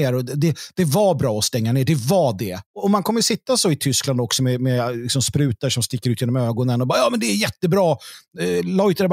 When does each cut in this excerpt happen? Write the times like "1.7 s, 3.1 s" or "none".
2.7 s